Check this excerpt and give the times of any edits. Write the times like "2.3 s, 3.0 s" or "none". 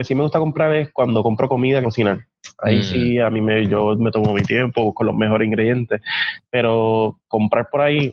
1.8 s

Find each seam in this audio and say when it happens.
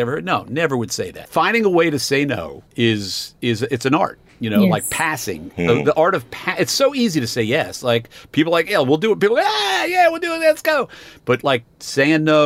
2.7 s

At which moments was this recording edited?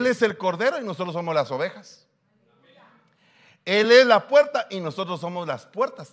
none

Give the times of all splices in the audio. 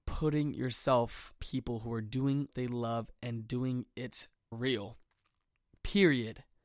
1.4 s, 2.5 s, 4.5 s

